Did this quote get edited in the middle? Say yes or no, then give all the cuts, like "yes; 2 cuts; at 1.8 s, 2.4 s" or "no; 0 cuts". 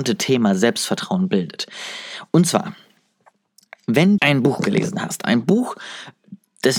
yes; 1 cut; at 4.2 s